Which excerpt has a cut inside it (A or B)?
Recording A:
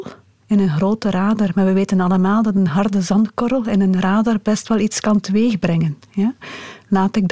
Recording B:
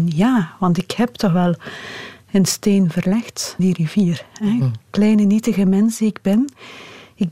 B